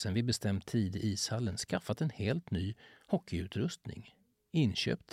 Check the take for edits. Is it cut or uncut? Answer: uncut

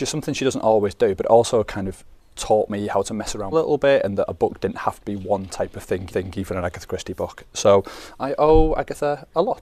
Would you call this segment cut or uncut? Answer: cut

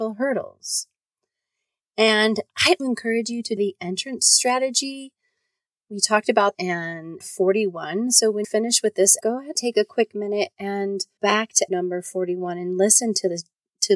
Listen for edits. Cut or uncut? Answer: cut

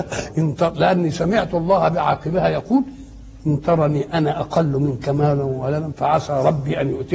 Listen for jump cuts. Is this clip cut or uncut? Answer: uncut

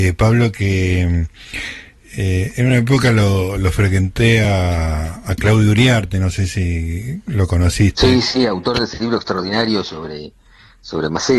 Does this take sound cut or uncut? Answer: uncut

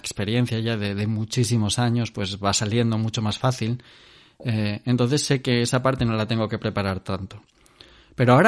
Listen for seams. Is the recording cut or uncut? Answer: uncut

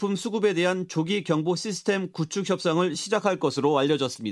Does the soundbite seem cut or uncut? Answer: uncut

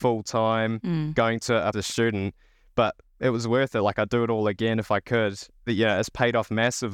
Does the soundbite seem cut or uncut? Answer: cut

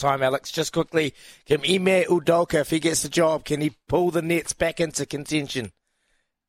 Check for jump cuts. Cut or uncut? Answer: uncut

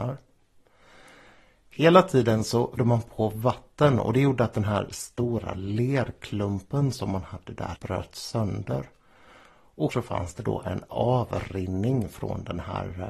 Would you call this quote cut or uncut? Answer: cut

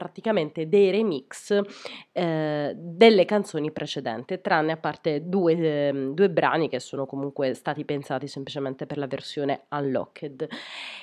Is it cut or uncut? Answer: uncut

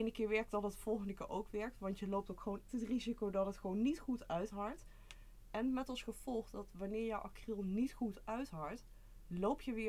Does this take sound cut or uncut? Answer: cut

